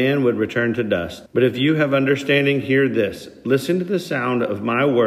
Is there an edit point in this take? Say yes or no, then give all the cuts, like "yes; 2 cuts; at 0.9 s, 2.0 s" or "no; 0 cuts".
yes; 1 cut; at 1.3 s